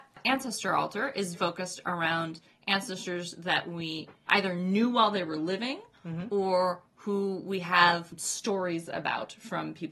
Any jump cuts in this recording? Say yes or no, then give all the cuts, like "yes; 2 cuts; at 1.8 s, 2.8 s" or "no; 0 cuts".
yes; 2 cuts; at 1.3 s, 4.3 s